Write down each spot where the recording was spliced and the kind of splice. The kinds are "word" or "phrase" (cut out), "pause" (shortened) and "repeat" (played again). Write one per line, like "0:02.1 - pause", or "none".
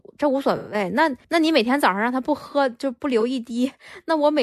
0:01.2 - pause